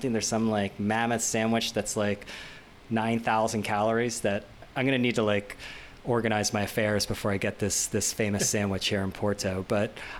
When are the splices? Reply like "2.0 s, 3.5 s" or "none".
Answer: none